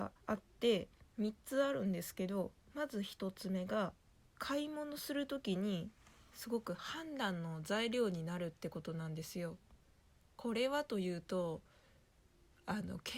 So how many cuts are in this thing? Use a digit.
1